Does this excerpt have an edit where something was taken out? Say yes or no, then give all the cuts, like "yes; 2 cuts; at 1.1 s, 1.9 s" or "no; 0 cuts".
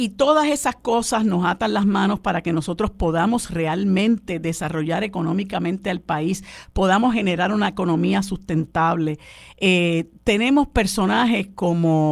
no; 0 cuts